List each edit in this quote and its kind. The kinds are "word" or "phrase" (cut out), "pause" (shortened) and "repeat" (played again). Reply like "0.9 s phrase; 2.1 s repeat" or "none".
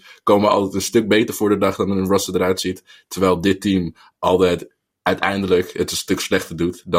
none